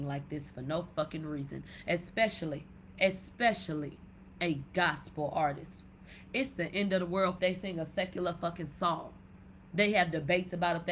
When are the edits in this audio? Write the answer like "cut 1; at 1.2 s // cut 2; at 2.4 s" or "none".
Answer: cut 1; at 7.4 s